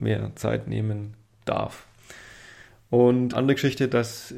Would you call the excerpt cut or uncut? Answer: cut